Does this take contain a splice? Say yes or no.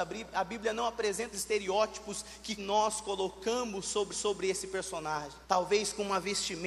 yes